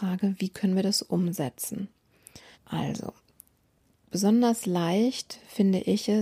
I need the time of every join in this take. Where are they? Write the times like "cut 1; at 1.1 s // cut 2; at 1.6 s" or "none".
cut 1; at 2.5 s